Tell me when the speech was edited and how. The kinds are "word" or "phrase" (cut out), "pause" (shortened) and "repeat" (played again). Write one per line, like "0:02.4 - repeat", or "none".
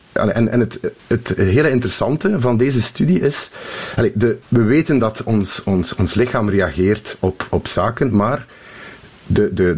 0:01.0 - pause
0:04.4 - pause
0:07.5 - word

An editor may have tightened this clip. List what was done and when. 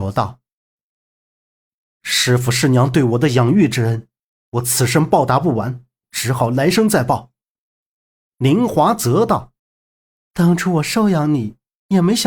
0:09.6 - pause

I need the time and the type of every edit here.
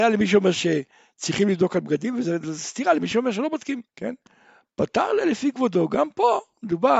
0:03.9 - pause

